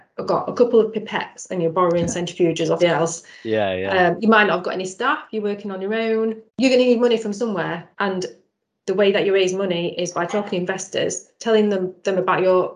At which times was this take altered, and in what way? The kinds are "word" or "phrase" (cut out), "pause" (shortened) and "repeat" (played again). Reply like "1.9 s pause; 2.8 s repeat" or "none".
2.8 s word; 6.5 s pause; 7.9 s pause